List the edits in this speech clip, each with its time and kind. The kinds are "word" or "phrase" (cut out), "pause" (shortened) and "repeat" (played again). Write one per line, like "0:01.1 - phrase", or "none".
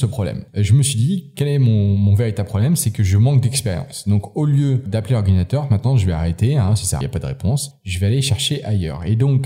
0:07.0 - phrase